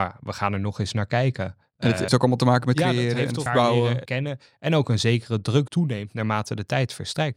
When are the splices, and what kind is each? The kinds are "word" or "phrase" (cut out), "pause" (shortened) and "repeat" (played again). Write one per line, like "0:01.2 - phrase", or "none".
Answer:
0:02.1 - word
0:02.7 - word
0:03.5 - word
0:04.0 - word
0:05.7 - word